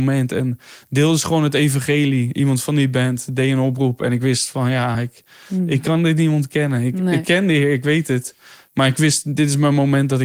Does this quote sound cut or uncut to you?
uncut